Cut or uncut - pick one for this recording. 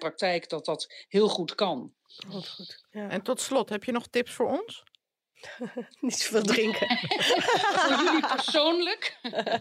cut